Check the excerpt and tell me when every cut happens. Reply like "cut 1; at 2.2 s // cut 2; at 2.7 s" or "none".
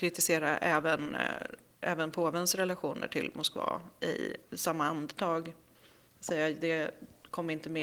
cut 1; at 4.5 s